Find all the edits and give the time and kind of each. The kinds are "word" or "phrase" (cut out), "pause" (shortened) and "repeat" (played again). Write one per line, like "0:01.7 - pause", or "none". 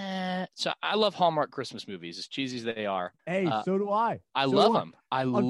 0:03.2 - pause